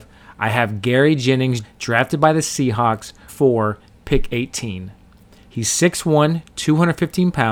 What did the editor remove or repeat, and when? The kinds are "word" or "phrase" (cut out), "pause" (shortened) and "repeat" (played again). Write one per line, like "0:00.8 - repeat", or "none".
0:01.6 - word
0:03.3 - word